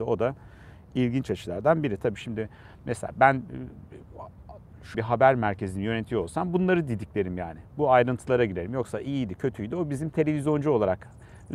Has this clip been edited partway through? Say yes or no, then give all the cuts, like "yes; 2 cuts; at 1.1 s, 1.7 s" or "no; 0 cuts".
yes; 1 cut; at 4.9 s